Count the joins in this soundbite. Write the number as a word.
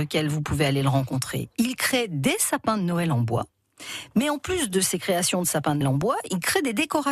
one